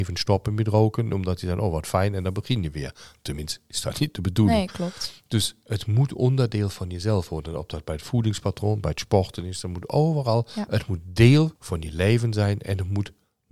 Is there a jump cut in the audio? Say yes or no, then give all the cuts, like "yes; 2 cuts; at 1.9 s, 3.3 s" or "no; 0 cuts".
yes; 1 cut; at 11.6 s